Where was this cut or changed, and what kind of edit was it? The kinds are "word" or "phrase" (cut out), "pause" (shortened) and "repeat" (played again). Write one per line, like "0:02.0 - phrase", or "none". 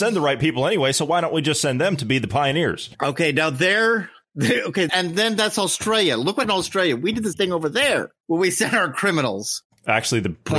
0:02.9 - pause
0:04.9 - word
0:06.4 - word
0:07.3 - word